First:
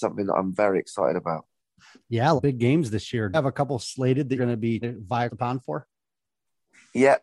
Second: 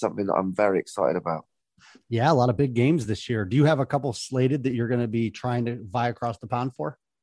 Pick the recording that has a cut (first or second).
first